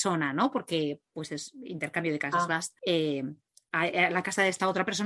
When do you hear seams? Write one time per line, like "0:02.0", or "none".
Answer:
0:02.8